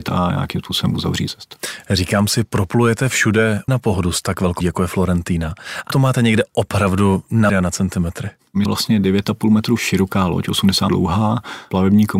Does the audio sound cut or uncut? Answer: cut